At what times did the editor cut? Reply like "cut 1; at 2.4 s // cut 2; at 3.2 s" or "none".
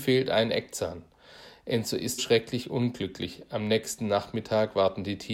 cut 1; at 2.2 s